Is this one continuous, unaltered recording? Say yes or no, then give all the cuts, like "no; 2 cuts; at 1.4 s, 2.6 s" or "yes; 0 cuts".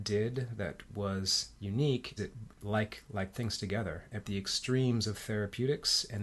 no; 4 cuts; at 2.2 s, 2.5 s, 3.3 s, 4.2 s